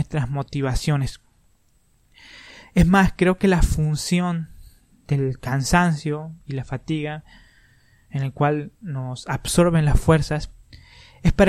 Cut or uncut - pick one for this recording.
uncut